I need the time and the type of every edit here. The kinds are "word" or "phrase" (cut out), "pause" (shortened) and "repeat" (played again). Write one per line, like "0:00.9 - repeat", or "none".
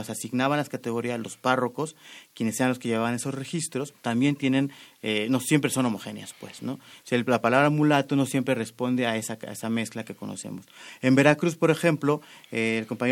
0:04.0 - pause